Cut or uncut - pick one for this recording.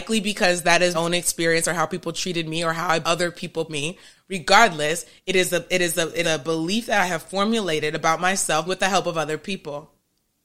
cut